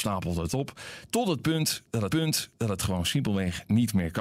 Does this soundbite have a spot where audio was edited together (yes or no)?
yes